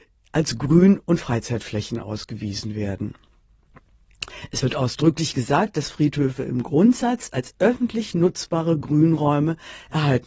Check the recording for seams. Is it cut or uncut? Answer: uncut